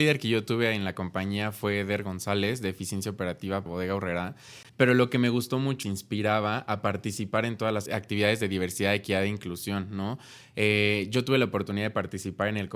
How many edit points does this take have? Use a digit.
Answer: 4